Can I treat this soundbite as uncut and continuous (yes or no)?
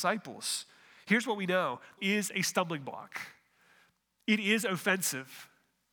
no